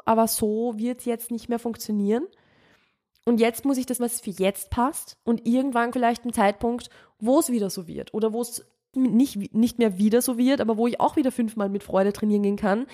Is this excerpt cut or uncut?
cut